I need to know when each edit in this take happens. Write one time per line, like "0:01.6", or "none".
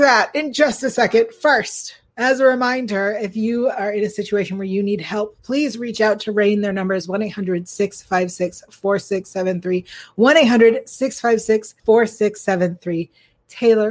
0:02.1
0:11.8